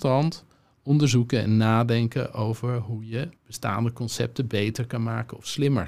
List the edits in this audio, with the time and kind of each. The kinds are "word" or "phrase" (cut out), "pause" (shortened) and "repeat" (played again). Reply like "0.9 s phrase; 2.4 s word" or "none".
3.4 s pause